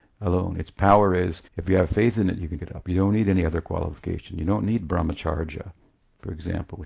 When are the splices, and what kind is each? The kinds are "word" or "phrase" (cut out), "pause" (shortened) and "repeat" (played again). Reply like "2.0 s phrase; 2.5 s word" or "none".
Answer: 1.5 s pause; 2.6 s word

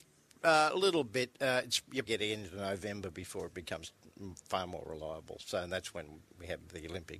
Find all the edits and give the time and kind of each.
2.1 s word

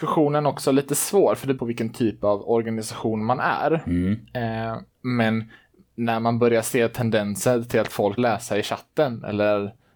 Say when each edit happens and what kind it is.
1.6 s phrase; 2.4 s word; 4.9 s pause; 8.2 s word

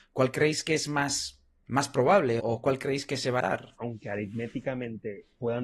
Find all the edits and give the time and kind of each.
none

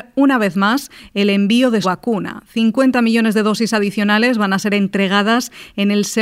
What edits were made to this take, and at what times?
1.8 s word

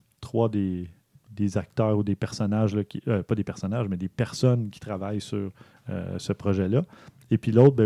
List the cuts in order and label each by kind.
none

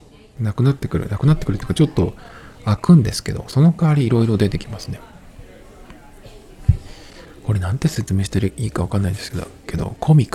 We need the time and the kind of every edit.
none

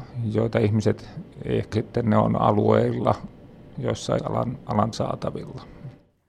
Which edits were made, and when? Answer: 1.7 s phrase; 3.7 s word; 4.2 s phrase; 4.9 s word

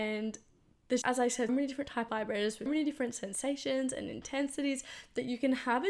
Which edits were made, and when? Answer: 1.0 s word; 1.5 s word; 2.1 s word; 2.7 s word

